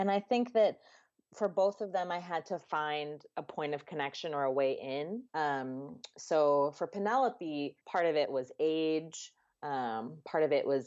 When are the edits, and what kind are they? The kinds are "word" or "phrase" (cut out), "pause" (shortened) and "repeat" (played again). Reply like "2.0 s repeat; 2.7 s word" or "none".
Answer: 5.3 s pause; 7.8 s pause